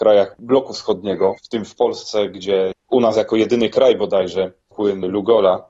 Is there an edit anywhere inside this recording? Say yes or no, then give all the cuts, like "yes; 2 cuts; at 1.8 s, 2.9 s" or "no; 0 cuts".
yes; 2 cuts; at 1.4 s, 4.7 s